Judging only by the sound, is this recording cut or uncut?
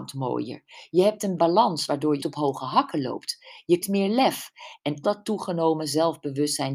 cut